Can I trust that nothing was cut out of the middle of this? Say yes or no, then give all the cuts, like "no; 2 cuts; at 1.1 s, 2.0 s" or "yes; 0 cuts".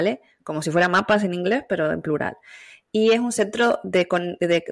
yes; 0 cuts